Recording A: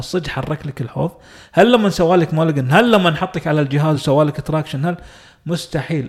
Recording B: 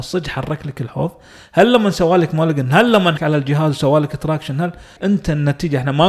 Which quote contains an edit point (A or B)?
B